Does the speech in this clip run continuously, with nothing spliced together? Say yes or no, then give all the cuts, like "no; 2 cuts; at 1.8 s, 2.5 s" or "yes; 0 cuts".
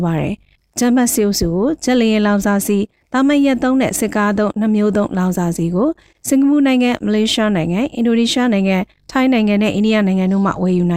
yes; 0 cuts